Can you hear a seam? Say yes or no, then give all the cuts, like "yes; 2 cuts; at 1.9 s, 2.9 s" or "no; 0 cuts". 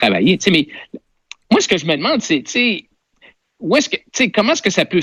no; 0 cuts